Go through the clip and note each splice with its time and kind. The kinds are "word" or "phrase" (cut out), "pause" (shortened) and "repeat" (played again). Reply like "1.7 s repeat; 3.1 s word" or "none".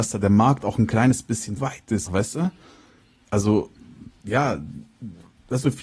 1.6 s word; 2.1 s word

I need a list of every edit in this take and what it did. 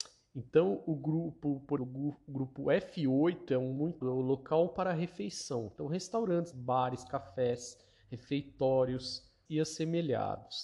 1.8 s word; 4.0 s word; 6.5 s word; 9.5 s word

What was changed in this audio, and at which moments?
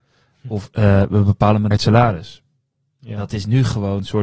1.7 s word

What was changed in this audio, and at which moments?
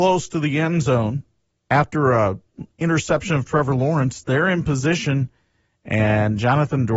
none

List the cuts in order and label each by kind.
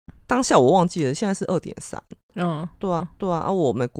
3.0 s repeat

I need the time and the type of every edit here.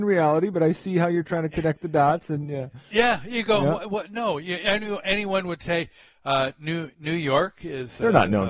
none

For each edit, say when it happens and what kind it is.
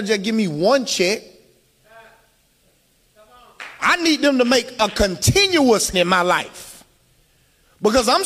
5.9 s word

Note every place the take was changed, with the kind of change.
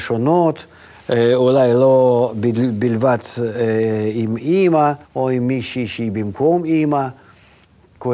5.0 s pause

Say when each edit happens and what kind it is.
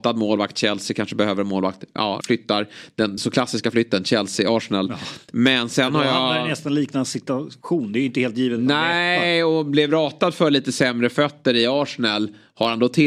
2.2 s word; 3.2 s word

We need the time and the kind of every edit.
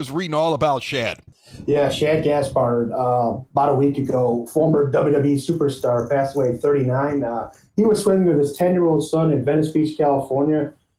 none

